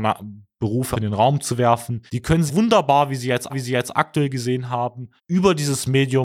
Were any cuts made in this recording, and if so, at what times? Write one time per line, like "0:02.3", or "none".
0:00.9
0:02.1
0:02.5
0:03.5
0:05.2